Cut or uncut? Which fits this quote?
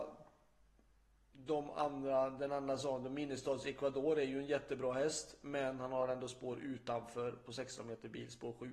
uncut